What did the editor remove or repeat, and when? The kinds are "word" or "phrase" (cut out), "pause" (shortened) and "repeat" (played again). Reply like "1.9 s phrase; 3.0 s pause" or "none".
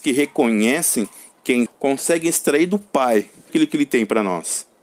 1.7 s word; 3.5 s word